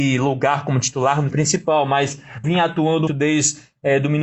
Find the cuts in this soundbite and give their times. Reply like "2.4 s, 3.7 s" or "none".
1.3 s, 2.4 s, 3.1 s